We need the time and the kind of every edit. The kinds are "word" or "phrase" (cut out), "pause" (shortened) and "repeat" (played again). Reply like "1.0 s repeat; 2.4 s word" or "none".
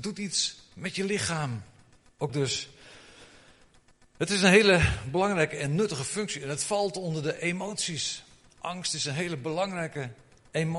2.3 s word